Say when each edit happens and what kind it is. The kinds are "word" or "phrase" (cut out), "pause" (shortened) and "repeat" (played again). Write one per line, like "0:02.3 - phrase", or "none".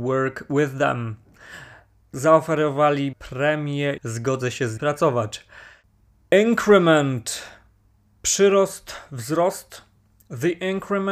0:03.1 - word
0:04.0 - word
0:04.8 - word

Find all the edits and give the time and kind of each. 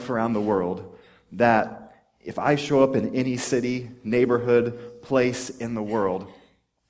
none

